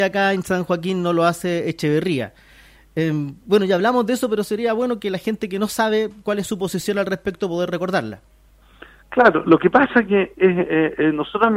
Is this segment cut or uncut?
uncut